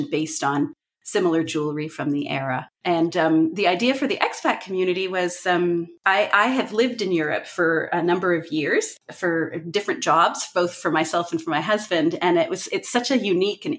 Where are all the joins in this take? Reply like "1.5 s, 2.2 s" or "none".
2.7 s, 6.0 s, 9.0 s